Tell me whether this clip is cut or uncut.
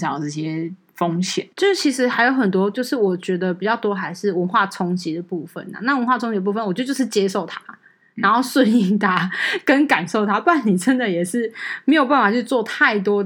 cut